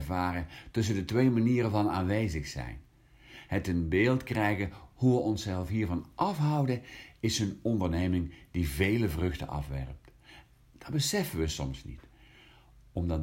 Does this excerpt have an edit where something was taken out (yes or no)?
no